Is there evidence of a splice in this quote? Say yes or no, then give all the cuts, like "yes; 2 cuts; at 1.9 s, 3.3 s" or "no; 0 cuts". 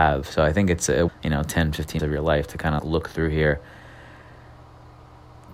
yes; 3 cuts; at 1.1 s, 2.0 s, 2.8 s